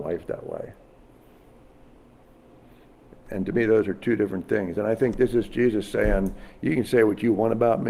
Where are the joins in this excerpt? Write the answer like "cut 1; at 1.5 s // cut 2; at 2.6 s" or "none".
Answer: none